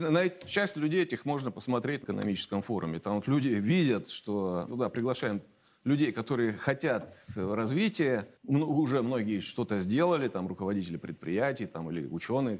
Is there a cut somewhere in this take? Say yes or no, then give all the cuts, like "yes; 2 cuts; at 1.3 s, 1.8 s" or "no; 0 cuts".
yes; 3 cuts; at 2.0 s, 4.7 s, 8.4 s